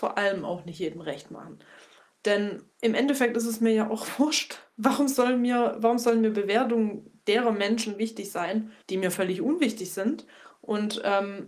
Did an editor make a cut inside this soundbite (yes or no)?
yes